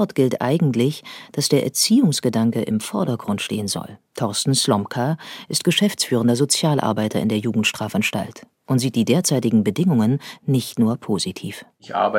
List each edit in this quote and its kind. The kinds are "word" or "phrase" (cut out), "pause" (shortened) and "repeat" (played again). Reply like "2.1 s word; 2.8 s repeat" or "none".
4.1 s pause; 8.5 s pause